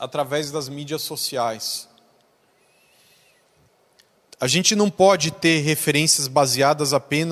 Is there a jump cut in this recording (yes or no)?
no